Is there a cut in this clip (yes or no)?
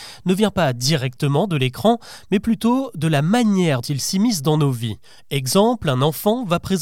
yes